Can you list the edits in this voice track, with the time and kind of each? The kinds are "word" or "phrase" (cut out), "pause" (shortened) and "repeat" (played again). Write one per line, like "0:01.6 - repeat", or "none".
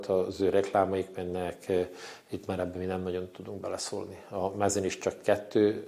none